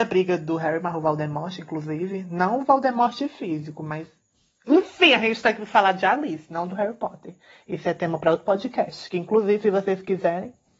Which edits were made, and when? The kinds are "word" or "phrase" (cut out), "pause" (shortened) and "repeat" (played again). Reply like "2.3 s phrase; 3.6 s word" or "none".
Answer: none